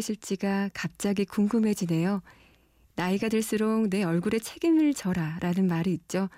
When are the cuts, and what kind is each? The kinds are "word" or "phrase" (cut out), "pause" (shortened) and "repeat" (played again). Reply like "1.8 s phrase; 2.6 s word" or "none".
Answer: none